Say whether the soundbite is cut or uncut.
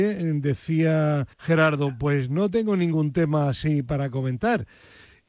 cut